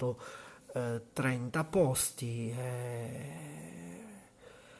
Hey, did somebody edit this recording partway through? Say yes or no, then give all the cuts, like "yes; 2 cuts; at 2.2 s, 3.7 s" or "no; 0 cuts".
no; 0 cuts